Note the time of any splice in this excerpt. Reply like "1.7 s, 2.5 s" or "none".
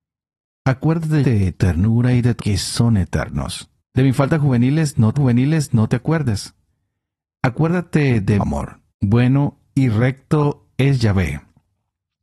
1.2 s, 1.5 s, 2.4 s, 3.8 s, 5.1 s, 8.4 s, 8.9 s